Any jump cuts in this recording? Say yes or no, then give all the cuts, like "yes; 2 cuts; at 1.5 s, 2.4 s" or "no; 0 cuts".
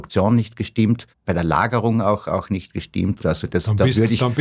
no; 0 cuts